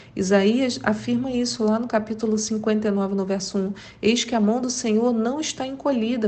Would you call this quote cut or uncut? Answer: uncut